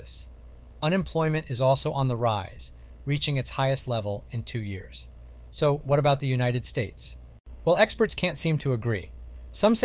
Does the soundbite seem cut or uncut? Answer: uncut